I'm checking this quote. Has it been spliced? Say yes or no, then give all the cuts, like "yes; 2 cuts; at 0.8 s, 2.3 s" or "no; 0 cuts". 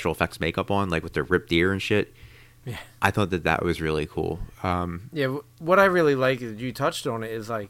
no; 0 cuts